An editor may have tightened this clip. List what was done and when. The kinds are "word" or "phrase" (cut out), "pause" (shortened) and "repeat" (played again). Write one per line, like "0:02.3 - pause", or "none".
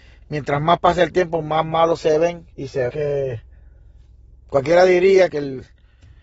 0:02.5 - pause
0:02.9 - word
0:05.3 - word